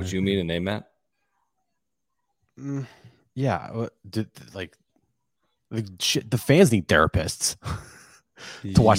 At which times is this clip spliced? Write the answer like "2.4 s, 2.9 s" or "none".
none